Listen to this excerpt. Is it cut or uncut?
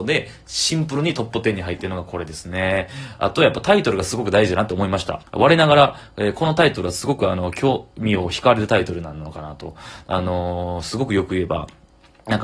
cut